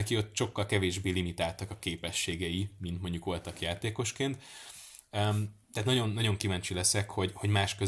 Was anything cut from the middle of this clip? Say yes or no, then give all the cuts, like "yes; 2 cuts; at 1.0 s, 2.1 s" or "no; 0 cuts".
no; 0 cuts